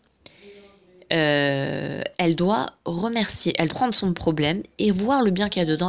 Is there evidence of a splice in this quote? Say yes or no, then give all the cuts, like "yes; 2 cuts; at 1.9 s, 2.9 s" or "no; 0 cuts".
yes; 2 cuts; at 2.1 s, 3.7 s